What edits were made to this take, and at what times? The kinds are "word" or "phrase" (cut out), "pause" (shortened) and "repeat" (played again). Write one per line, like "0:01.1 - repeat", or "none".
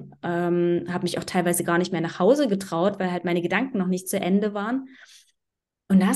none